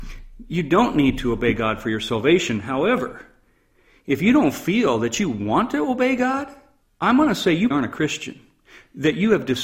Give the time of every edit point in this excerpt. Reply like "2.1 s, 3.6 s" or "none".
6.8 s, 7.7 s